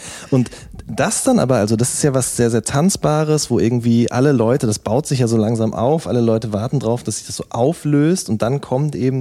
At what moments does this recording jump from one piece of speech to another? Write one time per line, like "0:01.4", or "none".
none

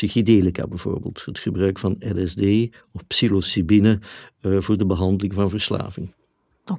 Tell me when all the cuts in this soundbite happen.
none

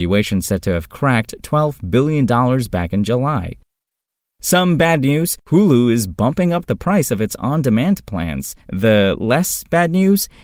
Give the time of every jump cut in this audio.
0:05.4
0:08.6

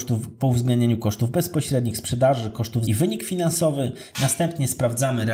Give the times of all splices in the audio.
0:02.9

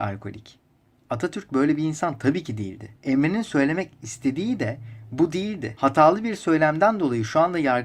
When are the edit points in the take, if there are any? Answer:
0:03.0

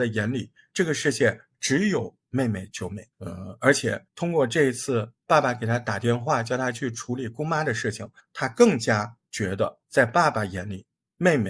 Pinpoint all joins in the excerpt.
0:03.1
0:04.1
0:08.2
0:09.2
0:09.8

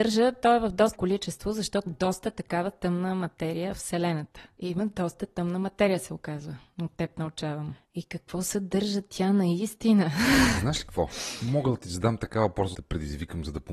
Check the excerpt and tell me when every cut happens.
0:00.9
0:01.9
0:03.7
0:12.7

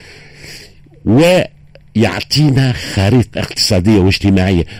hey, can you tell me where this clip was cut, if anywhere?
0:03.3

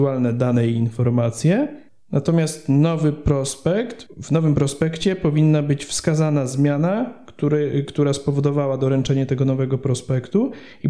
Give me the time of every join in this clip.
none

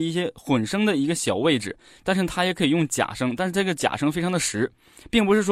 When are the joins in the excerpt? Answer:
none

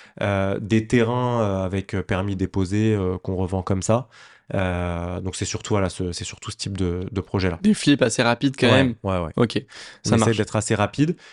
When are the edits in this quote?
none

